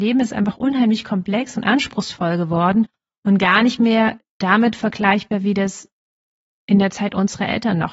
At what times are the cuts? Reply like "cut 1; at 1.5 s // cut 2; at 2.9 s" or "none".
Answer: none